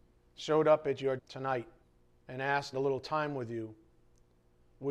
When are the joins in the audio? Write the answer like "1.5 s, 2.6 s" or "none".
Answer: 1.2 s, 1.8 s, 2.7 s

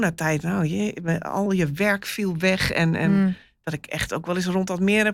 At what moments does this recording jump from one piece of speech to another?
none

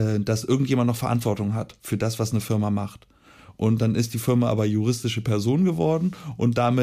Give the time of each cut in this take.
none

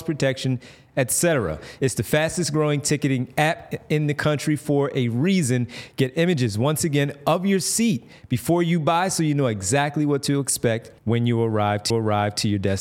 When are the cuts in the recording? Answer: 11.0 s, 11.9 s

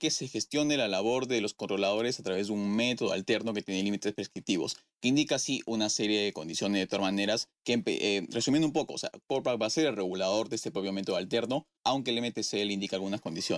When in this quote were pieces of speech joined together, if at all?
11.8 s

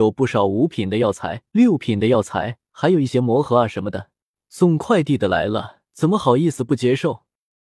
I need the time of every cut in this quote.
1.5 s, 2.6 s, 4.3 s, 5.9 s

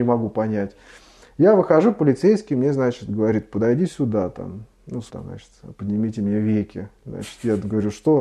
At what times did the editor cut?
5.1 s

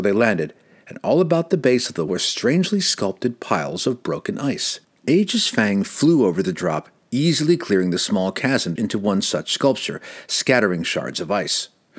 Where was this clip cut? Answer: 2.1 s, 4.8 s, 8.8 s

